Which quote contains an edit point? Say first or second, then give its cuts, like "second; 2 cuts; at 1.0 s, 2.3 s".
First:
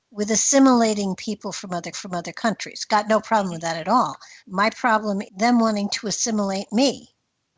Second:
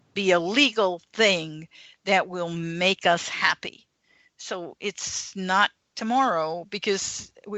first; 3 cuts; at 1.9 s, 4.4 s, 5.3 s